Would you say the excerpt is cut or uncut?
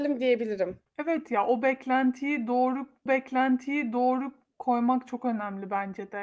cut